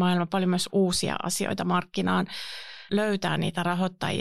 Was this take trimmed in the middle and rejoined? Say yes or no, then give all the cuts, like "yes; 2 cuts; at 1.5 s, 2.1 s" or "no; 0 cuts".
yes; 1 cut; at 2.9 s